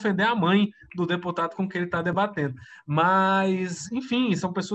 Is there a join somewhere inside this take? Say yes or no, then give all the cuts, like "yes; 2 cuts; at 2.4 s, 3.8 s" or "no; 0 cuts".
no; 0 cuts